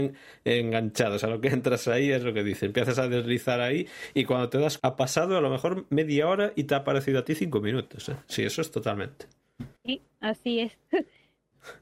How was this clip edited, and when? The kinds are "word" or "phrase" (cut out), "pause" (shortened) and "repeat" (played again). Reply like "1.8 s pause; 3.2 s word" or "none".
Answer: 4.8 s word; 9.8 s pause